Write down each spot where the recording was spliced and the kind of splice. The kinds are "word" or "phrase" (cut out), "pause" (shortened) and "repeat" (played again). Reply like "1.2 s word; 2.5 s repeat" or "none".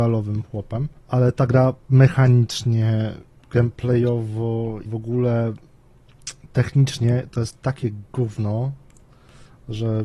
1.0 s pause; 1.8 s pause; 4.9 s word